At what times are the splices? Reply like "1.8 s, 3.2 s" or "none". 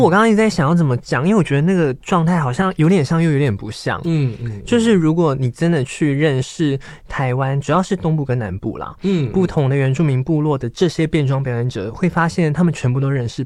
none